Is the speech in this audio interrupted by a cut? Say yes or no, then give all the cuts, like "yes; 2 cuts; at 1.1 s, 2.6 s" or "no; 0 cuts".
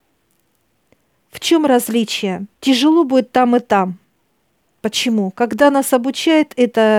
yes; 1 cut; at 2.5 s